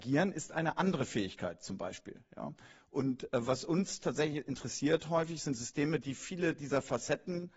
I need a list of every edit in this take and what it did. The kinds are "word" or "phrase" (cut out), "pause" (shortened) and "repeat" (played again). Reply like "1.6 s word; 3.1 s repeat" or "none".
none